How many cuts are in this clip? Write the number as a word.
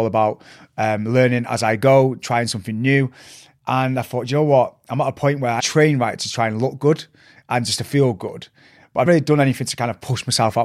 three